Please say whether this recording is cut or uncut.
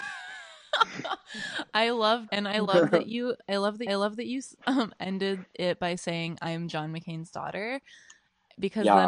cut